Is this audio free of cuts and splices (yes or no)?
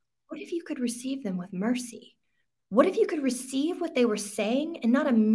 yes